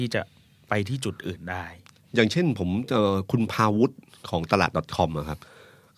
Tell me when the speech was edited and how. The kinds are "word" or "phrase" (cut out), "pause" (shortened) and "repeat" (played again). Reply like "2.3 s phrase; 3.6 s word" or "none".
none